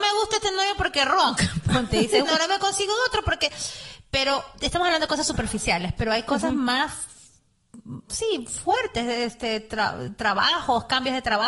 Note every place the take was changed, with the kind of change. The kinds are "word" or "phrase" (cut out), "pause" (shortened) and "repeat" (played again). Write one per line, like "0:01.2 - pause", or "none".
0:02.2 - word